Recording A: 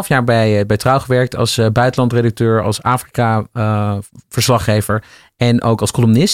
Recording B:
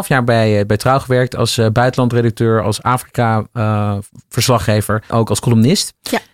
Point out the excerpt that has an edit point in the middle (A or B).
B